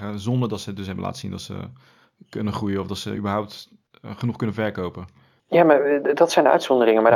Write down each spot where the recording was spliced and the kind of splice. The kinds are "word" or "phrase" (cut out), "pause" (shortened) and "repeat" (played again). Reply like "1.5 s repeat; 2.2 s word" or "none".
none

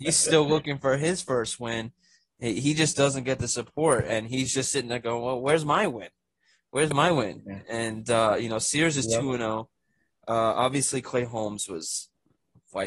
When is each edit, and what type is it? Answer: none

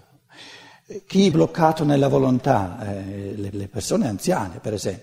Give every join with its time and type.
1.3 s word; 3.5 s repeat

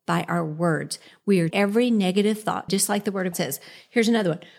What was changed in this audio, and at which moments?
1.5 s word; 2.7 s word; 3.3 s word

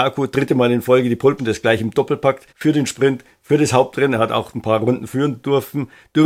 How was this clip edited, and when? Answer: 1.4 s word; 2.5 s pause

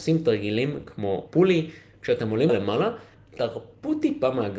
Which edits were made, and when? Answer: 1.3 s phrase; 2.5 s word

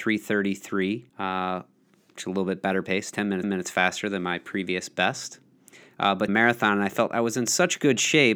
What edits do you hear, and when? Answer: 1.1 s pause; 3.4 s repeat; 6.3 s phrase

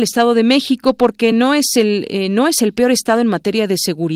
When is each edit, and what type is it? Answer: none

